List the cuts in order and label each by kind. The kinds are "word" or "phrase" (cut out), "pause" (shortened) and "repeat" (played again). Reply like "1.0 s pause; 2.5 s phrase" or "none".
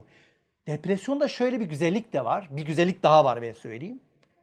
none